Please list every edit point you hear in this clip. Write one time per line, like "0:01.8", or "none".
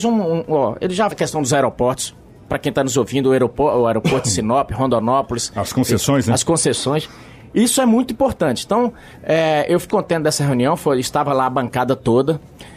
0:01.1
0:09.9